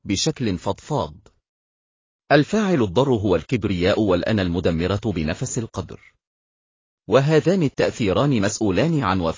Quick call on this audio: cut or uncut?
uncut